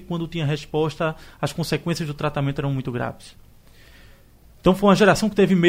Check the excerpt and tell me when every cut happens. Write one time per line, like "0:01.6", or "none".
none